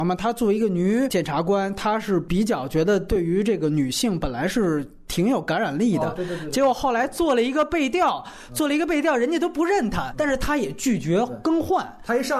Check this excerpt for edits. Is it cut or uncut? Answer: cut